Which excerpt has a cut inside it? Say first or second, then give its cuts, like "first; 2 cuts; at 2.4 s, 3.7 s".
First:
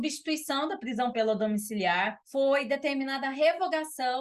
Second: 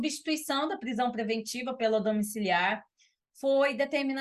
first; 2 cuts; at 1.1 s, 2.2 s